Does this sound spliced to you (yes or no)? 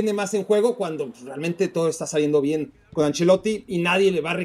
no